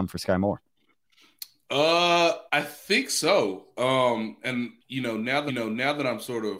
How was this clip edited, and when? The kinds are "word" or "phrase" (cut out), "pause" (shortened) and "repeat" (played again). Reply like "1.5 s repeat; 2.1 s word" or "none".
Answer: 2.5 s pause; 4.8 s pause; 5.5 s repeat